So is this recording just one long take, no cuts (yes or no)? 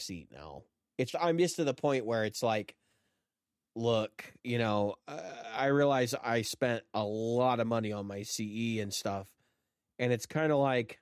no